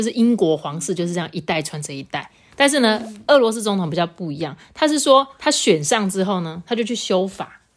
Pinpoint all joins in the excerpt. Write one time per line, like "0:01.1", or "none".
none